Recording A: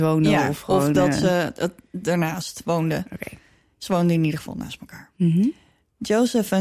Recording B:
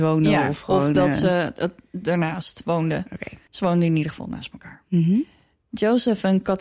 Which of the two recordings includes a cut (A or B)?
B